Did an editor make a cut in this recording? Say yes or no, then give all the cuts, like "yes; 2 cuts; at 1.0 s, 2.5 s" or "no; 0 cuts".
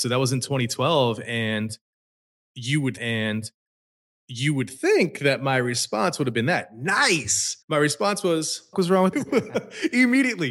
yes; 4 cuts; at 3.0 s, 7.6 s, 8.7 s, 9.1 s